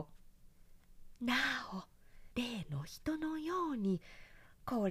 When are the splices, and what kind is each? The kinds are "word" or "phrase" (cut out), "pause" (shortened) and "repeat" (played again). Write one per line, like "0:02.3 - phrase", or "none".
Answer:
0:02.3 - pause